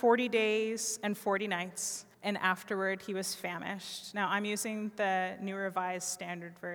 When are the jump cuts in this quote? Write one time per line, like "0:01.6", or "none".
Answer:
0:02.1

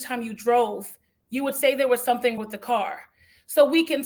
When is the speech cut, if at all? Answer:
0:02.4

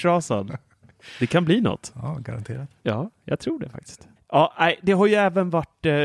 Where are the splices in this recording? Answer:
0:02.8
0:04.2

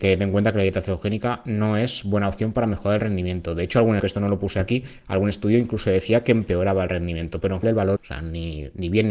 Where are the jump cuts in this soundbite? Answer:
0:04.0
0:07.6
0:08.0

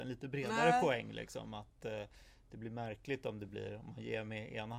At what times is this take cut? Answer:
none

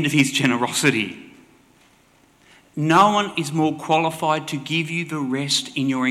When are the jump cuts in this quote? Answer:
none

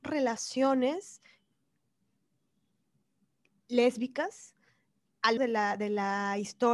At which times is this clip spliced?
0:05.4

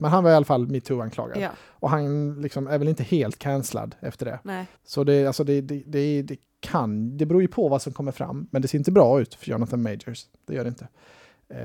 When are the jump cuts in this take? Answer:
0:04.8

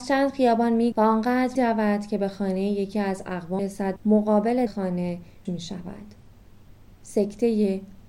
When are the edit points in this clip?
0:00.9
0:01.5
0:03.6
0:04.0
0:04.7
0:05.5

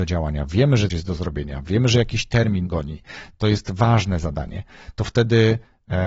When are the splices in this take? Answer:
0:00.9
0:02.7

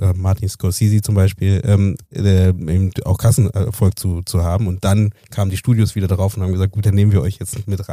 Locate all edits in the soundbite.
0:02.0

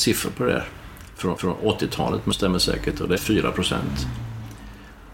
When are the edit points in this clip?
0:01.4
0:02.3
0:03.2

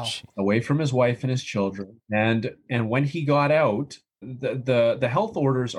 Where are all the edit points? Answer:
0:04.2

